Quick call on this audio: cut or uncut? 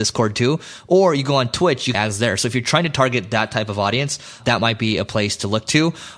cut